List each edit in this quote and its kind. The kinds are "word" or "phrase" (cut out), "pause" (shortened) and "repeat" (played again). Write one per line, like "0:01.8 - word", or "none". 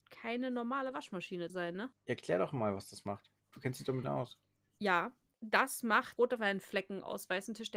0:01.5 - word
0:04.0 - word
0:06.2 - word